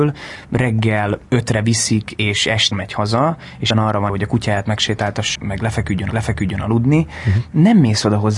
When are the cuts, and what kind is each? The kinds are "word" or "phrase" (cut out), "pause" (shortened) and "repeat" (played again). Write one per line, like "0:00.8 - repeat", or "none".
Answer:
0:01.3 - pause
0:02.7 - word
0:03.7 - word
0:04.1 - word
0:05.4 - word
0:06.1 - repeat